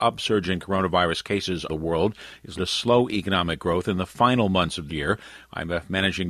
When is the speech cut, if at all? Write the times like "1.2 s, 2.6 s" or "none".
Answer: 1.7 s, 2.6 s, 4.9 s